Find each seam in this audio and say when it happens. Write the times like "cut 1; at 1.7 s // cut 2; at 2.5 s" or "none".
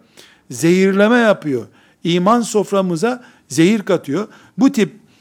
none